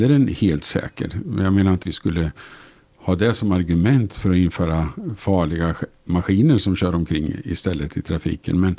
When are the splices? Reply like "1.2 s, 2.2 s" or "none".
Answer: 1.8 s